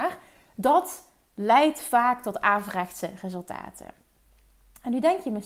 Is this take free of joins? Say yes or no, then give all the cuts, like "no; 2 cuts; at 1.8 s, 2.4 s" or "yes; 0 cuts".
yes; 0 cuts